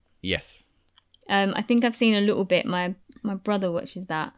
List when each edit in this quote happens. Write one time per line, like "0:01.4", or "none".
0:03.1